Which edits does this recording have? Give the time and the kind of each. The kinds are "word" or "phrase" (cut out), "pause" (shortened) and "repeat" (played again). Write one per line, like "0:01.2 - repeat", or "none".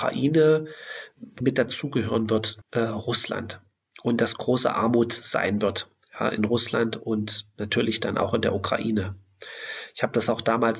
0:01.4 - word
0:02.6 - word